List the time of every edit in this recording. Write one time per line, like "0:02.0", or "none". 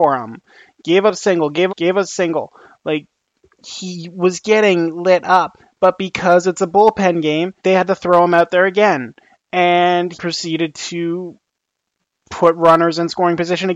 0:01.7
0:07.6
0:10.1